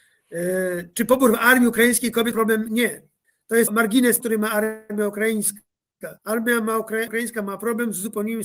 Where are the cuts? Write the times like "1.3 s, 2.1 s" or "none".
2.3 s, 3.2 s, 3.7 s, 4.2 s, 6.2 s, 7.1 s